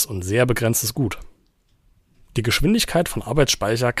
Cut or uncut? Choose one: uncut